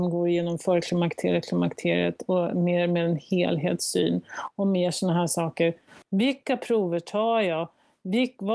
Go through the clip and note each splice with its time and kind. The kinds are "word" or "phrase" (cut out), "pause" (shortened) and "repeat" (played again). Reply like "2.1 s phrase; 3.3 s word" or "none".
6.0 s pause